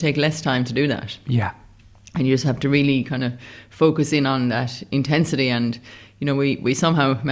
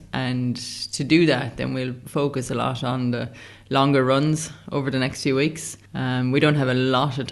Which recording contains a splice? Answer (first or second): second